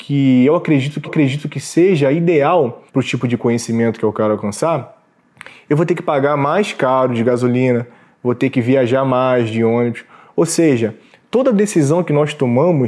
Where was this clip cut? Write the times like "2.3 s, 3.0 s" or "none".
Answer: 1.0 s, 2.9 s